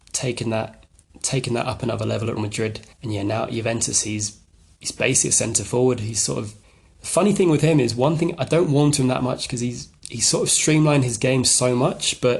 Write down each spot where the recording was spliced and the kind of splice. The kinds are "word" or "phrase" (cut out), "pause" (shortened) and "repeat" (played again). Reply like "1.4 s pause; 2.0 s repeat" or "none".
2.4 s word; 2.9 s pause; 6.6 s pause

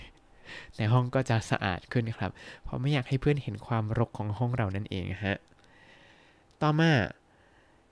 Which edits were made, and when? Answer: none

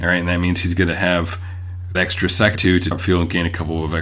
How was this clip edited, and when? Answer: 1.9 s word; 2.5 s word; 2.9 s word

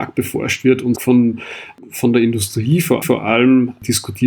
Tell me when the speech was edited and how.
0.9 s phrase; 3.0 s repeat

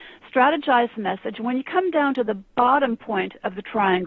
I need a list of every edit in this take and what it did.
none

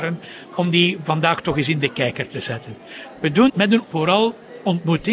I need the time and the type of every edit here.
3.5 s word; 3.8 s word

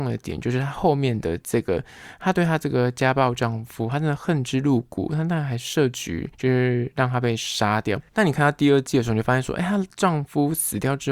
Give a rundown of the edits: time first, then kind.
6.3 s pause; 8.1 s pause

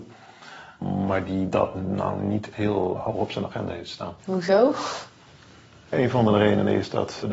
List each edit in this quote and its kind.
2.5 s word; 4.2 s pause

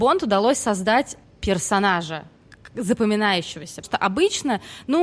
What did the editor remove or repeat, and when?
1.2 s word; 3.8 s word

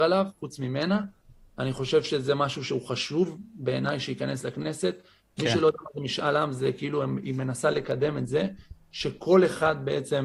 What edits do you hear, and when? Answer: none

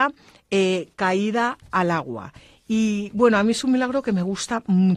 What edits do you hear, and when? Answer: none

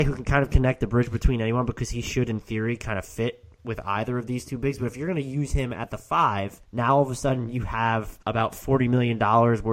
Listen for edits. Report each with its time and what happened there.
6.6 s pause; 8.2 s pause

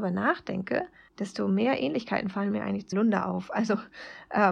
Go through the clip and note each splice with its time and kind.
1.1 s pause; 2.9 s word

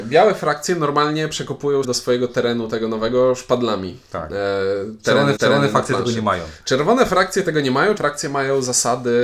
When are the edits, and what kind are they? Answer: 1.8 s word; 5.4 s repeat; 8.0 s word

